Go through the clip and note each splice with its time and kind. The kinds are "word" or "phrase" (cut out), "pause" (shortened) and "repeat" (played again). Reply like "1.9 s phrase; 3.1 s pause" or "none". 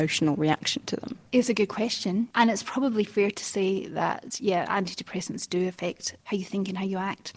1.3 s pause; 2.3 s pause